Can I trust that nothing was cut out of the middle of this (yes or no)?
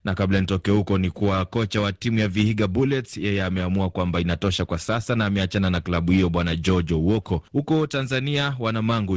no